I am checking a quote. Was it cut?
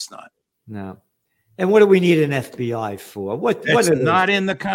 no; 0 cuts

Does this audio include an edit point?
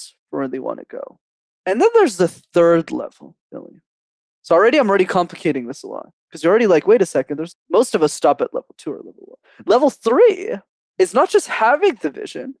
yes; 1 cut; at 7.5 s

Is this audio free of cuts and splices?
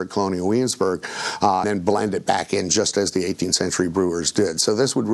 no; 1 cut; at 1.6 s

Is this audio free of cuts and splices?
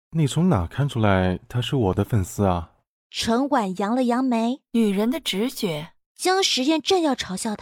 no; 3 cuts; at 3.0 s, 4.7 s, 6.0 s

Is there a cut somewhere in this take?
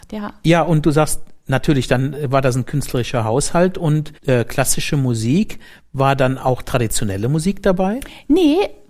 no; 0 cuts

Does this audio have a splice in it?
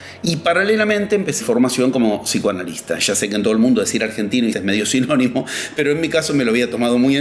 yes; 2 cuts; at 1.4 s, 4.5 s

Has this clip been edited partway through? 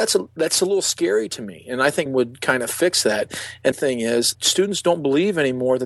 yes; 3 cuts; at 2.1 s, 3.7 s, 4.3 s

